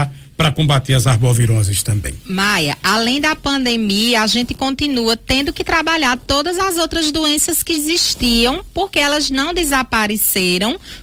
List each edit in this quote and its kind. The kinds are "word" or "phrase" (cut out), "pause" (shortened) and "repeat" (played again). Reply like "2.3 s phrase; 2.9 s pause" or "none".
7.7 s word